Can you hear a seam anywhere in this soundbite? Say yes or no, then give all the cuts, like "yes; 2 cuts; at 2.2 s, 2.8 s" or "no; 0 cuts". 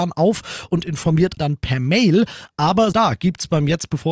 yes; 2 cuts; at 1.4 s, 2.9 s